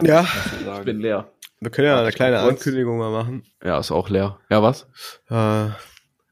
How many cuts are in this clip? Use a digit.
1